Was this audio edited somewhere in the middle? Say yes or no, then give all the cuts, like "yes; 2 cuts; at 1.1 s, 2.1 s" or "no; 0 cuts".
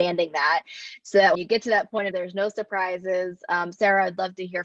yes; 2 cuts; at 1.3 s, 2.1 s